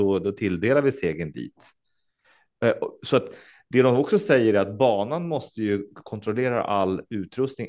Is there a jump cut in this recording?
no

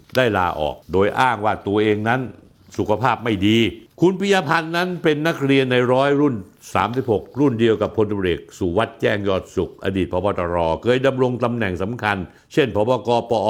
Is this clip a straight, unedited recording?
yes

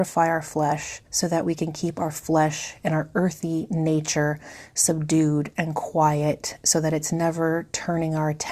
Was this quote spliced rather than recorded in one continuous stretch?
yes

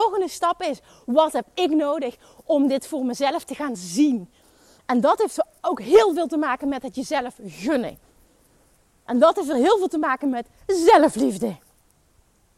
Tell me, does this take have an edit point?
no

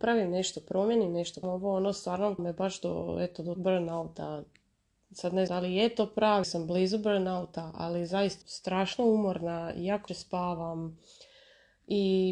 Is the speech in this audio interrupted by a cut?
yes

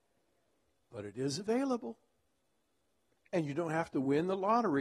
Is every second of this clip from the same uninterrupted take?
yes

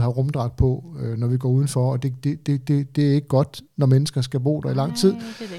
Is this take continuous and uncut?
yes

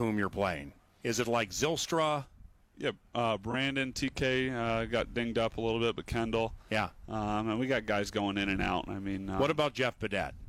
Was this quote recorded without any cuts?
yes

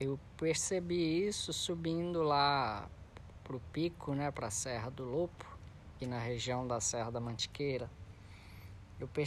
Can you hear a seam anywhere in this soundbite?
yes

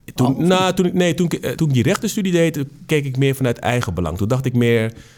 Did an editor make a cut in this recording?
yes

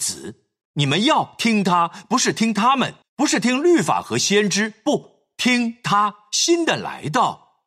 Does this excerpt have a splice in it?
yes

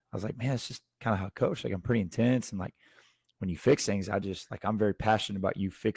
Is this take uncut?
yes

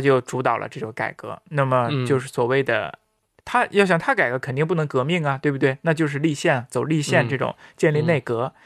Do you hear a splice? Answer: no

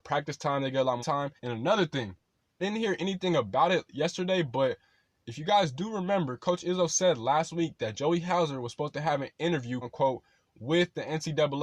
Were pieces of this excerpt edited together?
yes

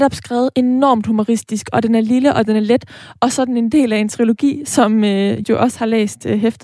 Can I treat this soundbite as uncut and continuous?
no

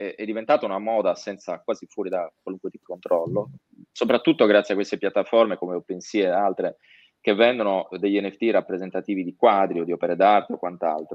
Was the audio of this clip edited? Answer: yes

